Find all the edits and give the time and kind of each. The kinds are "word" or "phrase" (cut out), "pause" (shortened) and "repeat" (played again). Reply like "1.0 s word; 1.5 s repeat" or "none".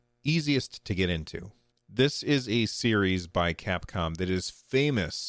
1.7 s pause